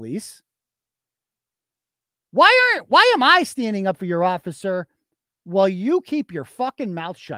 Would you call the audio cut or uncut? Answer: uncut